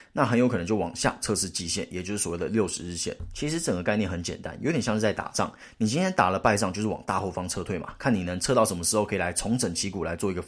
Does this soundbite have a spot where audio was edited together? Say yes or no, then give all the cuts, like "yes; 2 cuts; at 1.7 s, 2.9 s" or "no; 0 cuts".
no; 0 cuts